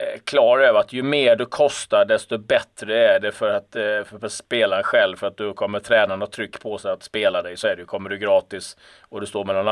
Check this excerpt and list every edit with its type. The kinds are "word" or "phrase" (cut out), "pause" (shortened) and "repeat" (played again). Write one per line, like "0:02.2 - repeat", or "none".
none